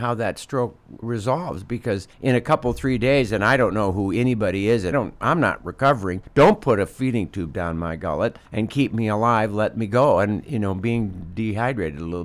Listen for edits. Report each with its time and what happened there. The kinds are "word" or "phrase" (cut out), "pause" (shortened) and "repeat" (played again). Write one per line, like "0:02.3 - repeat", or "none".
0:01.0 - word
0:02.1 - pause
0:04.9 - word
0:06.3 - pause
0:08.5 - pause